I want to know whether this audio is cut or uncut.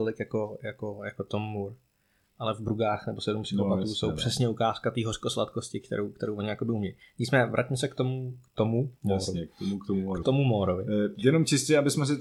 cut